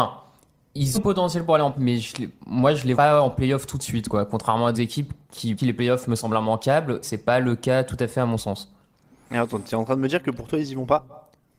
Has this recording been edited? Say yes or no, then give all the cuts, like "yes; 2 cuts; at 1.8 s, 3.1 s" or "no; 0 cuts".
yes; 6 cuts; at 0.9 s, 1.7 s, 2.9 s, 4.7 s, 5.6 s, 7.0 s